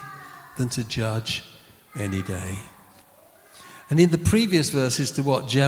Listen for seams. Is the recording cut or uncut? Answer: uncut